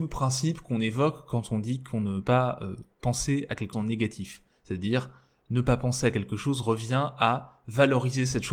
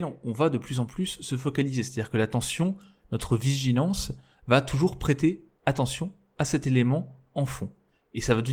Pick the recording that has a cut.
first; 2 cuts; at 2.2 s, 3.7 s

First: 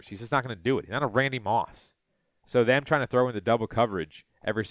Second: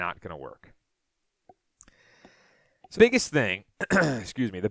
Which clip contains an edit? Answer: second; 1 cut; at 2.9 s

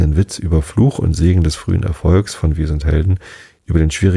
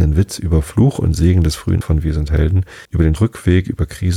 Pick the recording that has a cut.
second; 3 cuts; at 1.8 s, 2.8 s, 3.2 s

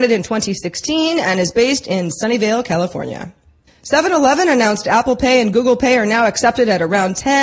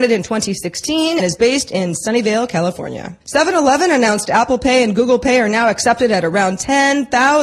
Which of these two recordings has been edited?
second; 2 cuts; at 1.2 s, 3.2 s

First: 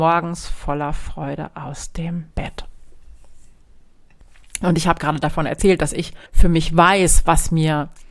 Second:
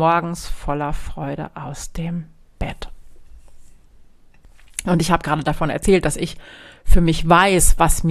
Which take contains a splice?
first; 2 cuts; at 2.3 s, 6.3 s

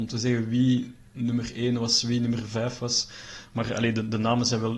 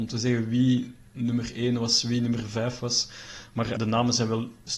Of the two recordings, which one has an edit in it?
second; 1 cut; at 3.8 s

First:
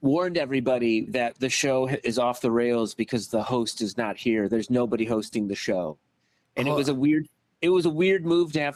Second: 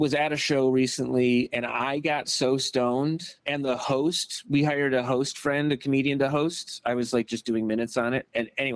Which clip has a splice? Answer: second; 1 cut; at 3.4 s

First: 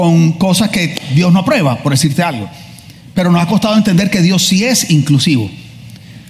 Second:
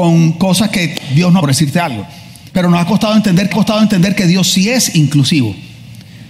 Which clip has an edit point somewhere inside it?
second; 3 cuts; at 1.4 s, 2.5 s, 3.5 s

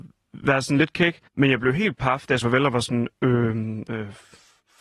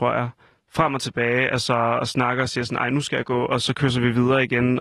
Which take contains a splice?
first; 2 cuts; at 1.3 s, 2.4 s

